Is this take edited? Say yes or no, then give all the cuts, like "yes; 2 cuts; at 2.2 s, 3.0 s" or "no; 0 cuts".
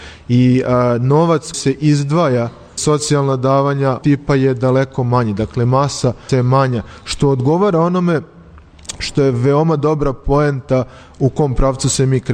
yes; 4 cuts; at 1.5 s, 2.8 s, 4.0 s, 6.3 s